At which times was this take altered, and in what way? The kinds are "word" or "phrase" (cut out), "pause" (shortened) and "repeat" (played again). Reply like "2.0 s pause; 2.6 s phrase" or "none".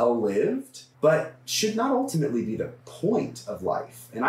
0.9 s pause; 2.8 s pause